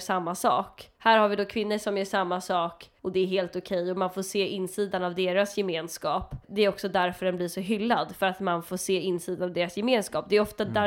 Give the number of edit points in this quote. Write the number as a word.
three